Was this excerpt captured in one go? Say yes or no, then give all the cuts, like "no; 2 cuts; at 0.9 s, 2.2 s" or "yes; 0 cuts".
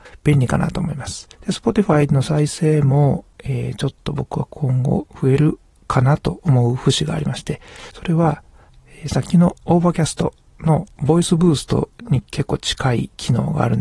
no; 3 cuts; at 1.3 s, 3.3 s, 5.1 s